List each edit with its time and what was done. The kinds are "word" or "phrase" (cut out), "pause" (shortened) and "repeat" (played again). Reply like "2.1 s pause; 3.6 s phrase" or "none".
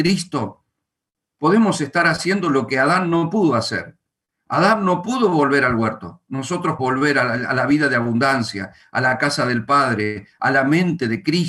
6.8 s word